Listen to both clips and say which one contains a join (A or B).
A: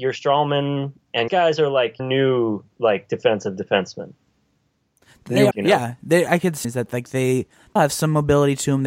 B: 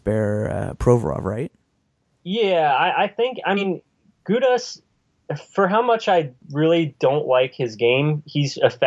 A